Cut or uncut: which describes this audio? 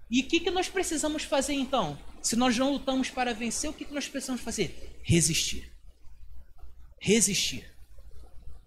cut